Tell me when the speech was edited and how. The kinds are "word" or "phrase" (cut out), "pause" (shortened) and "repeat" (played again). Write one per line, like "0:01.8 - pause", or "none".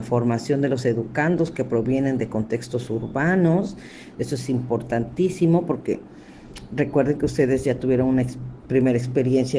none